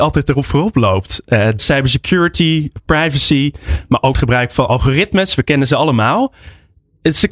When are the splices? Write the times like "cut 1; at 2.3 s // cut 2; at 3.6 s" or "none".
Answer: cut 1; at 1.6 s // cut 2; at 4.1 s